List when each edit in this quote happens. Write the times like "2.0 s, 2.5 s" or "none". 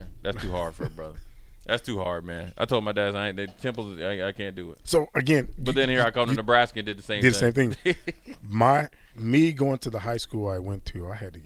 4.8 s